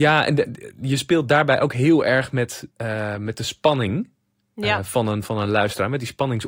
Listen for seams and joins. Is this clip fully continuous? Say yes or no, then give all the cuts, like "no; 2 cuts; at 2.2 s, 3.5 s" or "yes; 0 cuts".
no; 1 cut; at 2.7 s